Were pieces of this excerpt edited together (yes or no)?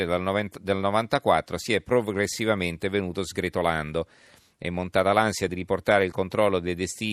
no